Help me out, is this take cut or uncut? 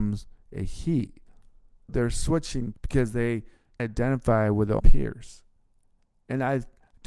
cut